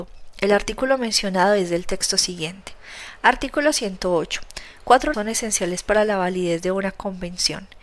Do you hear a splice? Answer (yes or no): yes